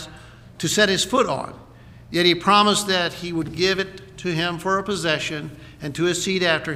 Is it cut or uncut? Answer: uncut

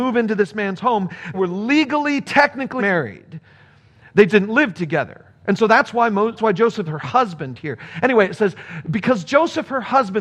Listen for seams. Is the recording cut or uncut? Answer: cut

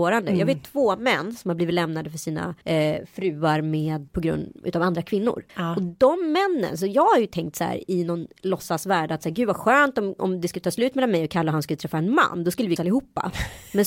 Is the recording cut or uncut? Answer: cut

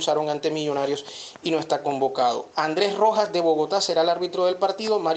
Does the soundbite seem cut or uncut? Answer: uncut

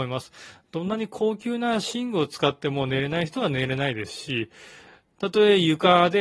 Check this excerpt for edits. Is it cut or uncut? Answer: uncut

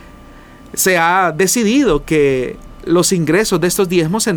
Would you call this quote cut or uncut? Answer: uncut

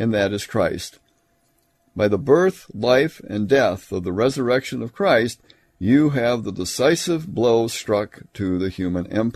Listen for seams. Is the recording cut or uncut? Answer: uncut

